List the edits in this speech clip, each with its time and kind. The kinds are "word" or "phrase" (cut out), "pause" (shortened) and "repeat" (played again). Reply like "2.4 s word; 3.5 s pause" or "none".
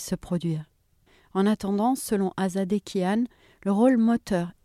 none